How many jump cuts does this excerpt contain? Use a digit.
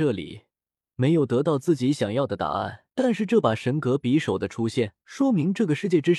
2